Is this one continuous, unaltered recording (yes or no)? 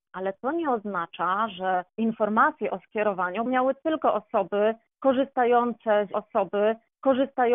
no